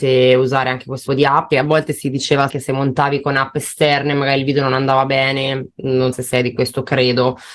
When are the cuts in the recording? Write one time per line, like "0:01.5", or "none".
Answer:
0:01.1
0:01.5
0:02.5
0:06.1